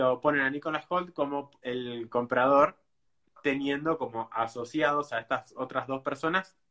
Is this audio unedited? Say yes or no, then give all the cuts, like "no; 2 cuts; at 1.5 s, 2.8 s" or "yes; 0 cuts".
yes; 0 cuts